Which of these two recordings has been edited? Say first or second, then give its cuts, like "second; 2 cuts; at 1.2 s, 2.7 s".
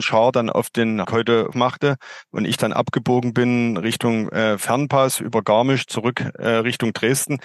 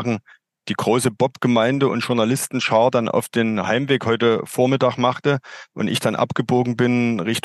first; 2 cuts; at 1.0 s, 1.5 s